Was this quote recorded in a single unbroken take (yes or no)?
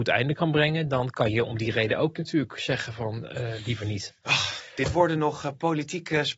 no